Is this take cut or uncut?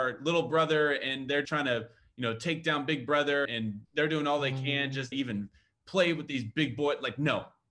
cut